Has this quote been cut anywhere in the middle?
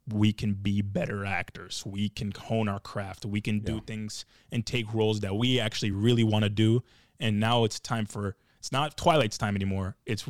no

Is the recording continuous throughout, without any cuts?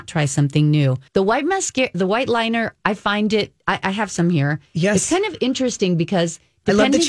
no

